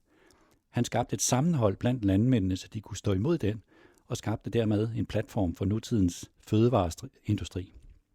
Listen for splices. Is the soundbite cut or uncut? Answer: uncut